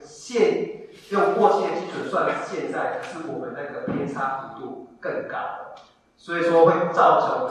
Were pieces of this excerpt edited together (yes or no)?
no